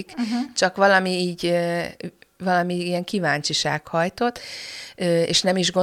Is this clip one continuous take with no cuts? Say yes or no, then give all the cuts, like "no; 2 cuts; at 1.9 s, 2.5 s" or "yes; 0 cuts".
yes; 0 cuts